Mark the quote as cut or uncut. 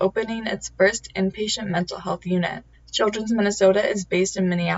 cut